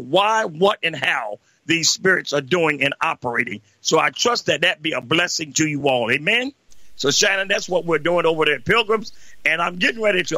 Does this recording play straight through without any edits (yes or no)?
yes